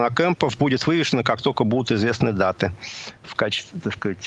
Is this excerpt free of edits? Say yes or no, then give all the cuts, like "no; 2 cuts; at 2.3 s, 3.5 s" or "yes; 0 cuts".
yes; 0 cuts